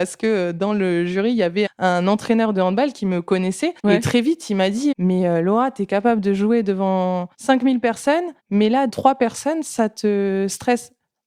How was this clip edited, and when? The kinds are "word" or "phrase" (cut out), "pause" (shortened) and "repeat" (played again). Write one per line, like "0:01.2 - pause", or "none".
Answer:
0:01.7 - word
0:03.8 - pause
0:04.9 - word
0:07.3 - pause
0:08.4 - pause
0:08.9 - phrase